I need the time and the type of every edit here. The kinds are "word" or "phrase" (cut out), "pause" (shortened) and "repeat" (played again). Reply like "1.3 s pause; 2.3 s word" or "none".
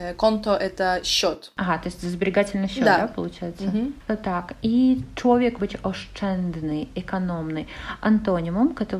5.6 s word